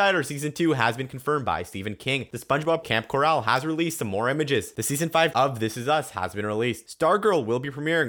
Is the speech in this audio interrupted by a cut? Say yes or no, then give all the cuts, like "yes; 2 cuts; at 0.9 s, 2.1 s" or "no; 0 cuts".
yes; 2 cuts; at 2.8 s, 5.3 s